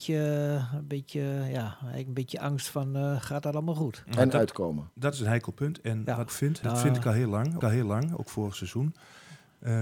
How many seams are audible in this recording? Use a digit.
3